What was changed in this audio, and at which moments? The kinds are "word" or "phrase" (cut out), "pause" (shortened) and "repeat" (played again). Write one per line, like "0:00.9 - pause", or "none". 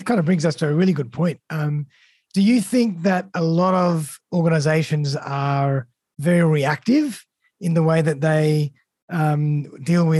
none